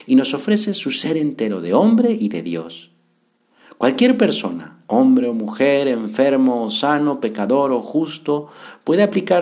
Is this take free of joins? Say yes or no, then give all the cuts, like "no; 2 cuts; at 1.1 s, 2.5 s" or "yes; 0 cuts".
yes; 0 cuts